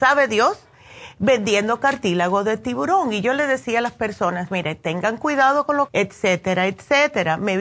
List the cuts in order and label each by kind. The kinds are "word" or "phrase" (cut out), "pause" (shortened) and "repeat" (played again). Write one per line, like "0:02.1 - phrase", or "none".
0:05.9 - phrase